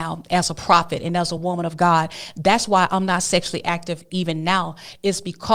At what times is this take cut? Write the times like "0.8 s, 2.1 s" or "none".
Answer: none

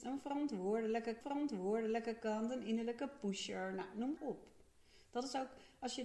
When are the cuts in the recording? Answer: 1.2 s, 4.2 s

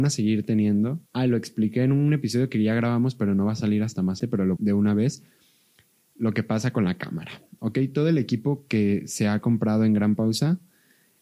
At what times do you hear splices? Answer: 1.1 s, 4.2 s, 4.6 s

